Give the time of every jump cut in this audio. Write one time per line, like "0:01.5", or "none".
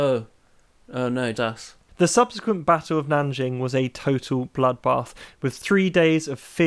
0:01.3